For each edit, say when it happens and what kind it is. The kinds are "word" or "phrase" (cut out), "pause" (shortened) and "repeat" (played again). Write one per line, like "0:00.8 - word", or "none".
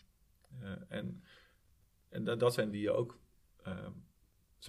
0:02.7 - word